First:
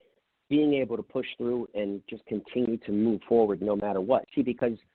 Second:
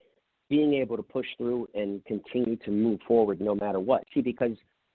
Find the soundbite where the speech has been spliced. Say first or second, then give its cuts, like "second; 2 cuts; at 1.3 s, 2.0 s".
second; 1 cut; at 2.0 s